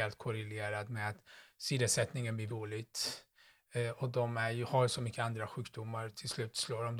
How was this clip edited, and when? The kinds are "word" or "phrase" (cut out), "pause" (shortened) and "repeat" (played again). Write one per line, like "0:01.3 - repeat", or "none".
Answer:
0:02.5 - word